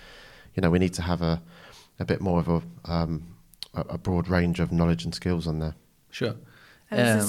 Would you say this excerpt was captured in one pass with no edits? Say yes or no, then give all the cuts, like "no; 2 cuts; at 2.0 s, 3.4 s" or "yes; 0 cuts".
yes; 0 cuts